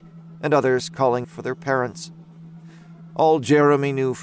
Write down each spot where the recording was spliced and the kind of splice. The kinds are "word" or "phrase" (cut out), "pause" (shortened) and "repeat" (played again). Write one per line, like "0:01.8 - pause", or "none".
0:01.2 - word